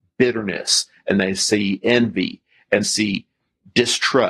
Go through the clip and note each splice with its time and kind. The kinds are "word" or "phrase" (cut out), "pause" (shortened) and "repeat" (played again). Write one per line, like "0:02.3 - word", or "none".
0:02.8 - word